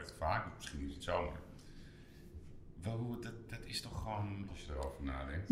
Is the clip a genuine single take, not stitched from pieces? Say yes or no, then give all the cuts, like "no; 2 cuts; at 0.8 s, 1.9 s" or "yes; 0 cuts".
no; 2 cuts; at 1.0 s, 4.5 s